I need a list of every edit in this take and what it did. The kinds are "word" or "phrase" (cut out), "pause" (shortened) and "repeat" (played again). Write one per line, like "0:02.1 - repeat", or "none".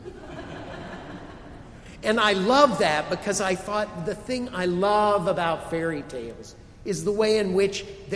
none